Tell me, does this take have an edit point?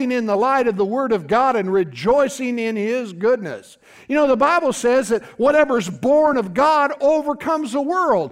no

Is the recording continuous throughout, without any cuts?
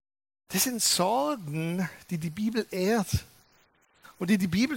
yes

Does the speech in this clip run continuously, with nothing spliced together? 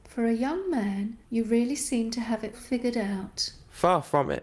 no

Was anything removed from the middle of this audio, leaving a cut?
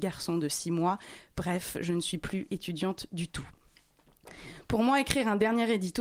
no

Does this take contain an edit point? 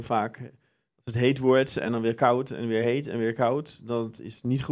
no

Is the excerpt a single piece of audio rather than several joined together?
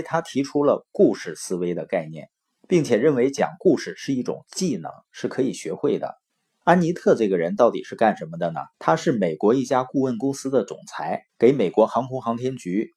no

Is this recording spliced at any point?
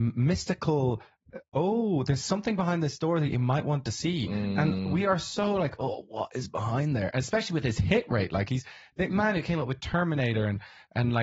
no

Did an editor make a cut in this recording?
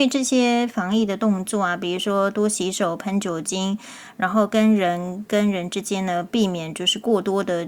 no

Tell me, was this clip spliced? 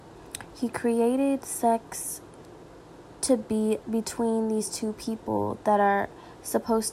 yes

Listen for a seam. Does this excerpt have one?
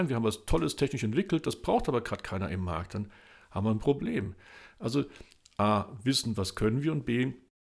no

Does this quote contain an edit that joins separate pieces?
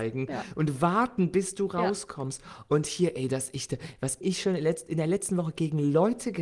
yes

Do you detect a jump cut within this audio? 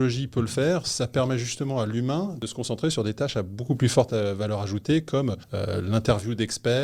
yes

